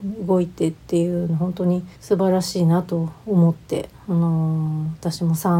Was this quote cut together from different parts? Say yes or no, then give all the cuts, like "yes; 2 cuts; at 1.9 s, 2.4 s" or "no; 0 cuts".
yes; 1 cut; at 2.0 s